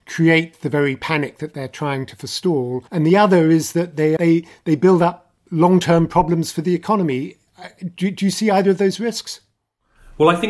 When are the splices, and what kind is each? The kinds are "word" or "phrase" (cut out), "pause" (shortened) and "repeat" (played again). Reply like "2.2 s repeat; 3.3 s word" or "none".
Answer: 2.9 s pause; 4.2 s phrase